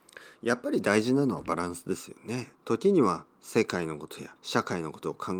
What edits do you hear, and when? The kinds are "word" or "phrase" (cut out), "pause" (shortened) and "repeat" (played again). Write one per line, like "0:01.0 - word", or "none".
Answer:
0:02.5 - pause
0:04.4 - pause